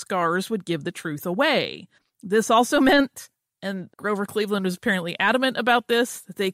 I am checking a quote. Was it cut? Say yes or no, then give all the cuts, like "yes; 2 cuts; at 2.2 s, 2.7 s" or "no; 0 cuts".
yes; 2 cuts; at 2.0 s, 3.9 s